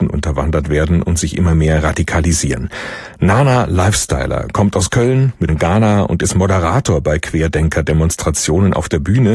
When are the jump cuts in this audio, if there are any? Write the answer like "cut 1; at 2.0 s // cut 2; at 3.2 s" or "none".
cut 1; at 5.5 s